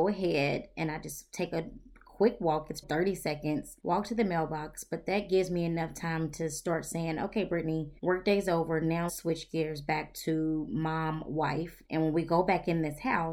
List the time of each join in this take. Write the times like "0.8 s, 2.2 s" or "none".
2.8 s, 3.8 s, 8.0 s, 9.1 s, 11.9 s